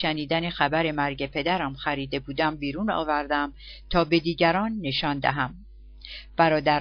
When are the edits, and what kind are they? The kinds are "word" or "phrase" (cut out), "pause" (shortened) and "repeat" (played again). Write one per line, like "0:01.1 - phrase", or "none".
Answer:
none